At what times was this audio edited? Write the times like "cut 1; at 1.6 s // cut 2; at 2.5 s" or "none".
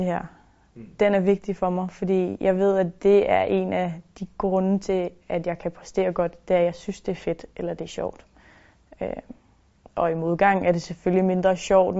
none